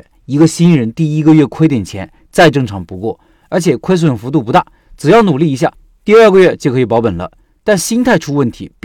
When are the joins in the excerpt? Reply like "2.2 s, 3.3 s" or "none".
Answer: none